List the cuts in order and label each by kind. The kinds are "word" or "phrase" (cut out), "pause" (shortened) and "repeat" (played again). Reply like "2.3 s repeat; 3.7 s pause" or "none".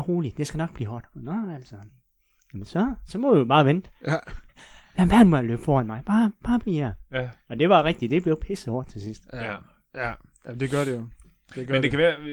none

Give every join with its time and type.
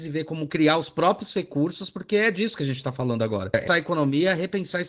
3.7 s word

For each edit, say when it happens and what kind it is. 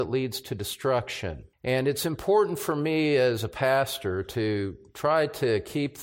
1.5 s pause

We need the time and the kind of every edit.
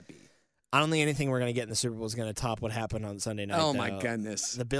none

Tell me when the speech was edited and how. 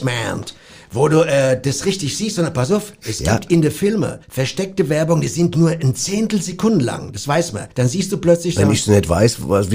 4.2 s pause; 7.7 s pause

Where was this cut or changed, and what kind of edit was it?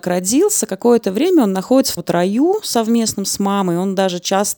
2.0 s word

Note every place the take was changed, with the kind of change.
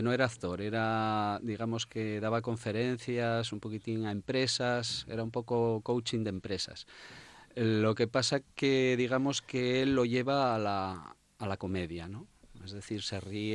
none

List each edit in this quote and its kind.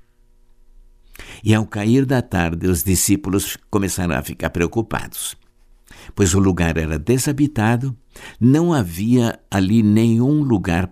none

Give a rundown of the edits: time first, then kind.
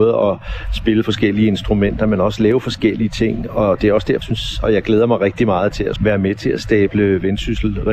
4.2 s word; 6.0 s word

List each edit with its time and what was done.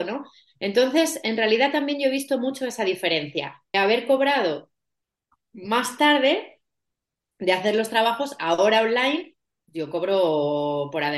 3.7 s word

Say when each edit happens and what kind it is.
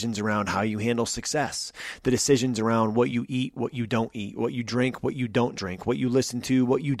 none

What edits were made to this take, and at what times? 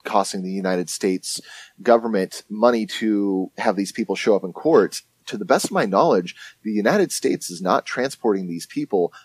none

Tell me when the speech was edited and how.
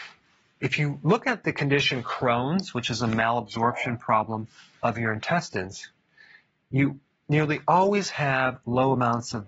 none

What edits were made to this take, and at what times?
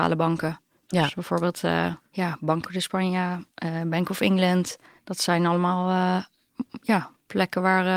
2.1 s pause; 2.6 s phrase

